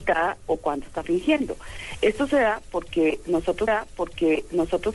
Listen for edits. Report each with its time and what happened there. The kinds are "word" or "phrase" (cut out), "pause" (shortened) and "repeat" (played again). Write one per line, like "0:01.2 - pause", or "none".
0:03.7 - repeat